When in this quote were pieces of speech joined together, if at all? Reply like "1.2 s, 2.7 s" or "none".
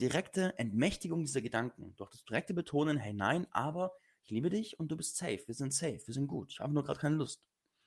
none